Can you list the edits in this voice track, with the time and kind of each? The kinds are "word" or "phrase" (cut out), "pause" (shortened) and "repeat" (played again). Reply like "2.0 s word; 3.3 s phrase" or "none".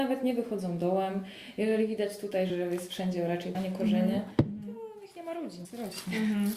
2.5 s word; 3.5 s word; 5.6 s word